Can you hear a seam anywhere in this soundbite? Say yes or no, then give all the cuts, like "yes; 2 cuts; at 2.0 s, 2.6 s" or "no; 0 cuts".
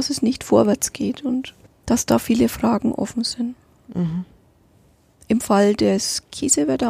no; 0 cuts